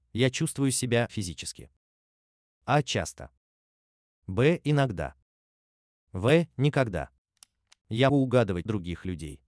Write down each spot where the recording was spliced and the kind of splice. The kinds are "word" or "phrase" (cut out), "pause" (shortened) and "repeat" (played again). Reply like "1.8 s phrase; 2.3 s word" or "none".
1.1 s word; 8.1 s word; 8.7 s word